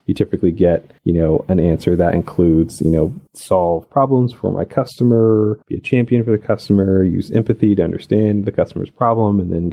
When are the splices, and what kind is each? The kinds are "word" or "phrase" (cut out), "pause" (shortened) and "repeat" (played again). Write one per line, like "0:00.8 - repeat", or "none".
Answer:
0:01.0 - pause
0:03.3 - pause
0:05.6 - pause